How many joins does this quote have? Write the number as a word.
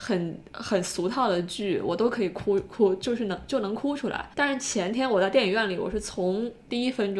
one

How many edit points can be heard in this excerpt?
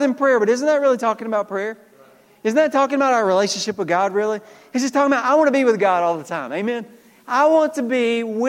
zero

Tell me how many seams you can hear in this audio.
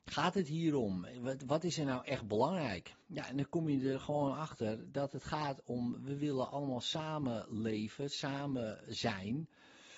one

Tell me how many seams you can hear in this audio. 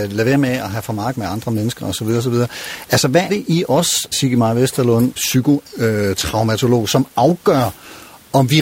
four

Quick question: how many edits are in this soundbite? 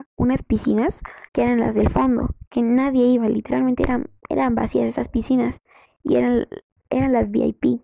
one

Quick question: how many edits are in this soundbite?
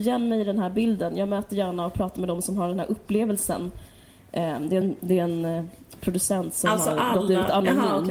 zero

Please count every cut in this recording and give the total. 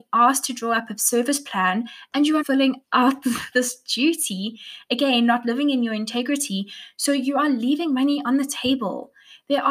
two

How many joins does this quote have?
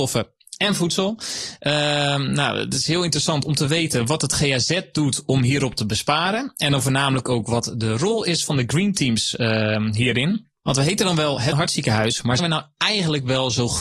two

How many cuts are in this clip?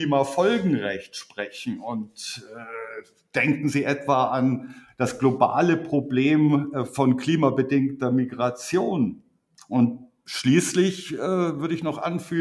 zero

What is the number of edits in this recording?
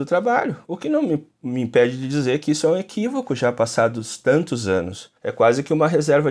one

